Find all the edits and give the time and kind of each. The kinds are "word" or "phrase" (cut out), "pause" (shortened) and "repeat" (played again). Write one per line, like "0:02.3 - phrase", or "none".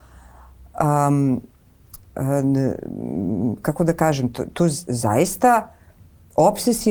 none